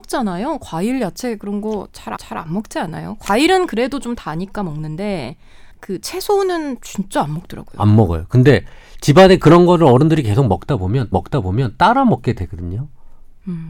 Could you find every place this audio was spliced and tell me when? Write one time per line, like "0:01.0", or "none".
0:02.2
0:05.7
0:11.1